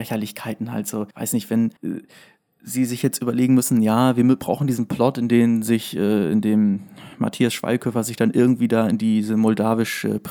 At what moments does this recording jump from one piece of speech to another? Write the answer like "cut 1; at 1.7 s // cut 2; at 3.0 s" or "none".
cut 1; at 1.1 s // cut 2; at 1.8 s

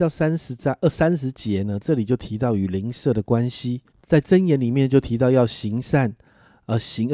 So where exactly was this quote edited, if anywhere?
cut 1; at 3.9 s

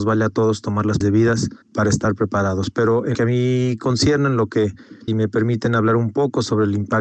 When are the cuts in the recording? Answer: cut 1; at 1.0 s // cut 2; at 1.6 s // cut 3; at 3.1 s // cut 4; at 5.1 s

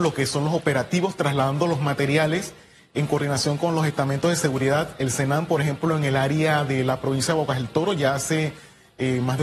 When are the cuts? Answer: none

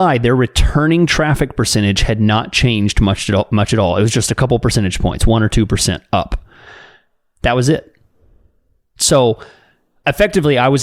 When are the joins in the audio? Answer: none

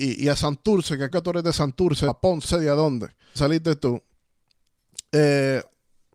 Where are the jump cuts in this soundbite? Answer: cut 1; at 1.1 s // cut 2; at 2.1 s // cut 3; at 2.4 s // cut 4; at 3.4 s

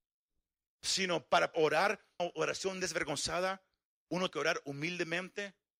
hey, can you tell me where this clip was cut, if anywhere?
cut 1; at 1.5 s // cut 2; at 2.2 s // cut 3; at 4.3 s

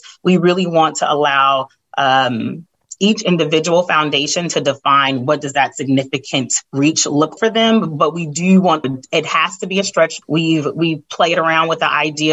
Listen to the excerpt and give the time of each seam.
cut 1; at 6.7 s // cut 2; at 7.4 s // cut 3; at 8.8 s // cut 4; at 10.2 s

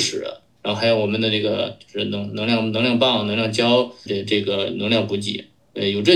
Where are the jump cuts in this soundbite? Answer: cut 1; at 4.1 s

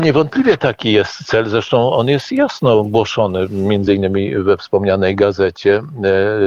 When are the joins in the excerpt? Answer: none

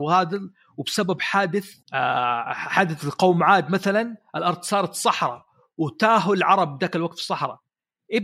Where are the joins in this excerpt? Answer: cut 1; at 1.8 s

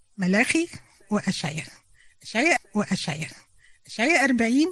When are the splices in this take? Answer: cut 1; at 2.6 s

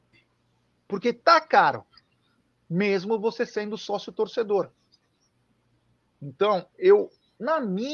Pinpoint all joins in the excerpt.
none

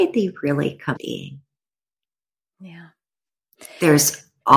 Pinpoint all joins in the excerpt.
cut 1; at 1.0 s

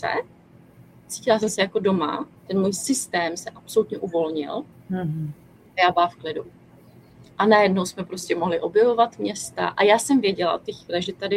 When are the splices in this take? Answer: cut 1; at 0.9 s // cut 2; at 2.4 s // cut 3; at 4.7 s

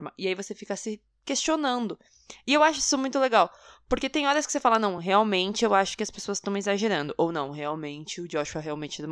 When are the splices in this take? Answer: none

